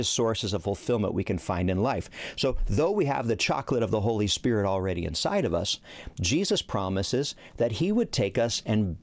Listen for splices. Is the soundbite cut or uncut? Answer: uncut